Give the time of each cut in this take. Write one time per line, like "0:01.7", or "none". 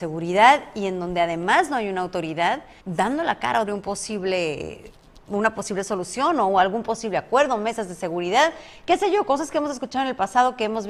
0:02.8
0:03.7